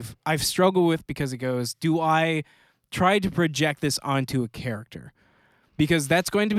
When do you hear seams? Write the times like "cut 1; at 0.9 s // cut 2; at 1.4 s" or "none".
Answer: none